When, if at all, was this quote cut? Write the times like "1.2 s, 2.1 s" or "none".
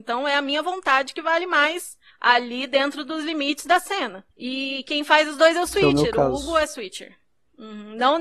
2.1 s, 4.3 s